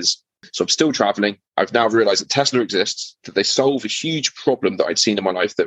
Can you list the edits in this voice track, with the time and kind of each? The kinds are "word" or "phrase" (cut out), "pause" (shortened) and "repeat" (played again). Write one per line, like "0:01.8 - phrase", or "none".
0:01.5 - pause
0:03.2 - pause